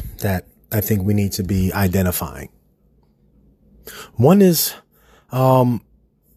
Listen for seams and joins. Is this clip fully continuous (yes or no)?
yes